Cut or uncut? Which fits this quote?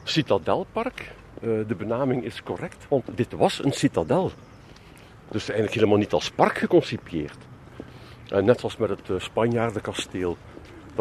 uncut